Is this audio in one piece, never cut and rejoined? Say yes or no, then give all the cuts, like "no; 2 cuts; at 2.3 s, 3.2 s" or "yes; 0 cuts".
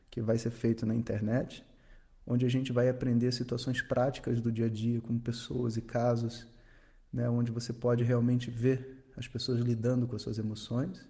yes; 0 cuts